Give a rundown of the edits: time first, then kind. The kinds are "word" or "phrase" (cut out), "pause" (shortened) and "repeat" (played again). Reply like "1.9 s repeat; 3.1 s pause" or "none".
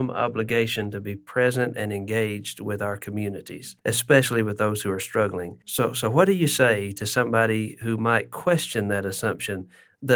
3.8 s pause; 5.6 s pause